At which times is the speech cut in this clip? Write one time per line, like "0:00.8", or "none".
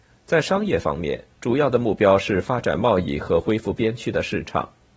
0:01.3